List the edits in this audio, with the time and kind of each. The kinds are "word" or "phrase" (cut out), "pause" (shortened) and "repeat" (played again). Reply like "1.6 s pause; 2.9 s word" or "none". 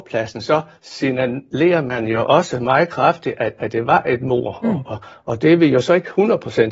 none